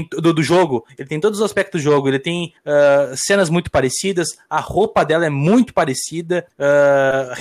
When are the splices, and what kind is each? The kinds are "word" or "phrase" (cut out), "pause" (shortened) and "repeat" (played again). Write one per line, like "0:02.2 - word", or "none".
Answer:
none